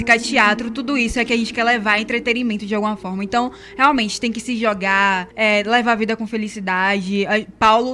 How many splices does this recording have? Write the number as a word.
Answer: one